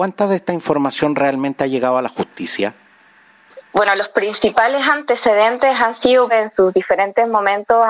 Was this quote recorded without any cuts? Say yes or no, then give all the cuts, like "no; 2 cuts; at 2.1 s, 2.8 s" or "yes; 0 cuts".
no; 1 cut; at 6.3 s